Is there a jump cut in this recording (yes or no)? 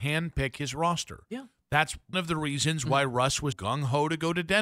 yes